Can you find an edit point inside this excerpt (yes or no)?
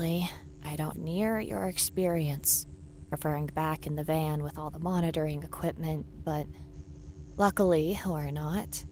yes